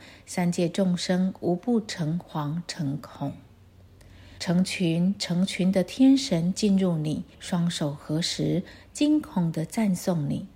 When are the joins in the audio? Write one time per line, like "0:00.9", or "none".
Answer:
0:04.4
0:07.3